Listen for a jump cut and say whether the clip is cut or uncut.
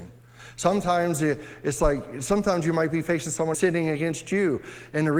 cut